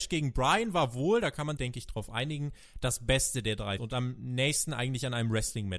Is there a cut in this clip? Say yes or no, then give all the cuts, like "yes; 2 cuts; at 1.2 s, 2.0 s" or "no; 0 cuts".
yes; 2 cuts; at 1.6 s, 3.8 s